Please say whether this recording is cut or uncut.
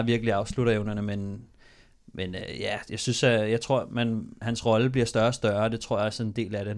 uncut